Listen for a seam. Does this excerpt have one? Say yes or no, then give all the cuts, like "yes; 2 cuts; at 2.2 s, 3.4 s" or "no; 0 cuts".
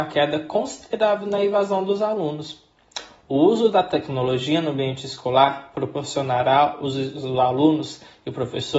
no; 0 cuts